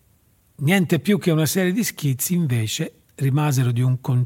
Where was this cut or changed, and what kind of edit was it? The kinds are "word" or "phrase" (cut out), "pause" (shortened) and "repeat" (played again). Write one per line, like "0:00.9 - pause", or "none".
0:03.0 - pause